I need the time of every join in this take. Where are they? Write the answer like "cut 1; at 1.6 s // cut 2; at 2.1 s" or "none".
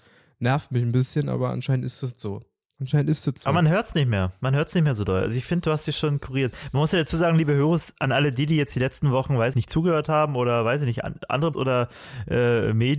cut 1; at 9.5 s // cut 2; at 11.5 s